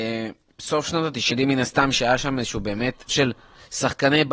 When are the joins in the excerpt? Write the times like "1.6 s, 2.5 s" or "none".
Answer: 1.3 s, 3.1 s